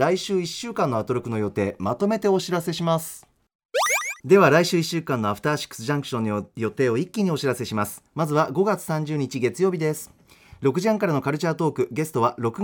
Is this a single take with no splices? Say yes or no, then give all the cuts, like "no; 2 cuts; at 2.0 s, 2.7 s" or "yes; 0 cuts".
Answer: no; 1 cut; at 4.2 s